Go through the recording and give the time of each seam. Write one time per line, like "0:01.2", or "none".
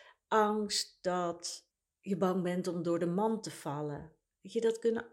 none